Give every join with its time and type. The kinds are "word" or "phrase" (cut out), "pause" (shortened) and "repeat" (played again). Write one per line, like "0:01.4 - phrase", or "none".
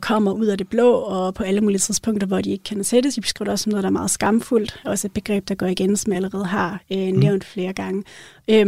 none